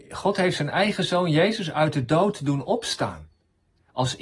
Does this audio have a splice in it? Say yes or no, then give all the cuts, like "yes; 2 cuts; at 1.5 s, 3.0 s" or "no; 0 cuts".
no; 0 cuts